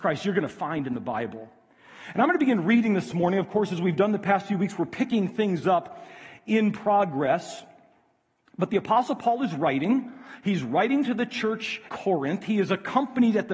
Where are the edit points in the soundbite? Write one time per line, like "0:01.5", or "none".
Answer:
0:11.9